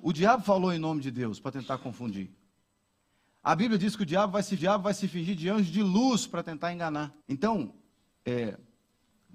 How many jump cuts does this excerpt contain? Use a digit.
2